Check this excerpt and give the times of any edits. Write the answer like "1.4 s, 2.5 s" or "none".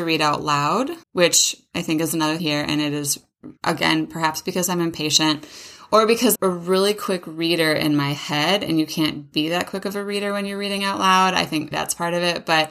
1.0 s, 2.4 s, 3.6 s, 6.3 s, 11.7 s